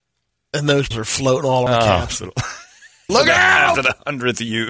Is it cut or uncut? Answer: cut